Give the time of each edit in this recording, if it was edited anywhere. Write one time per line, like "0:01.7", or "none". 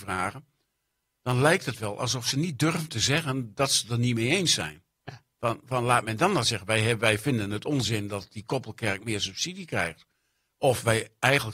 none